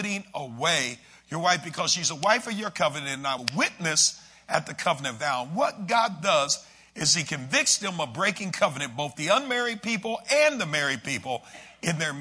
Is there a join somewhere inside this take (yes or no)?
yes